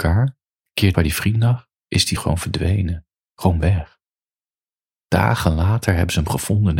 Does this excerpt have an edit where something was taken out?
yes; 2 cuts; at 0.9 s, 2.2 s

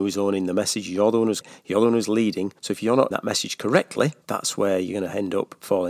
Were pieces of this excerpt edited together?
yes; 4 cuts; at 1.4 s, 2.6 s, 3.1 s, 4.2 s

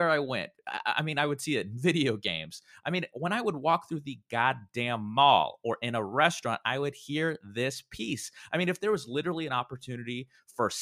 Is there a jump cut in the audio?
no; 0 cuts

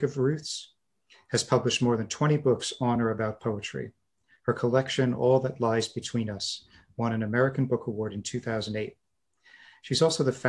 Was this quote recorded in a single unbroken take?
yes; 0 cuts

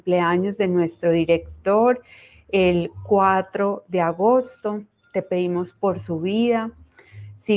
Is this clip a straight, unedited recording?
yes; 0 cuts

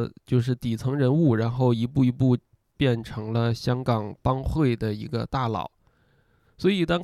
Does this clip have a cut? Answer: no; 0 cuts

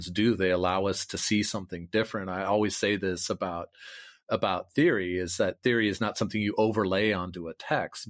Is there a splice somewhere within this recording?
no; 0 cuts

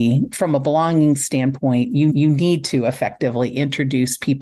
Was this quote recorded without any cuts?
no; 1 cut; at 2.1 s

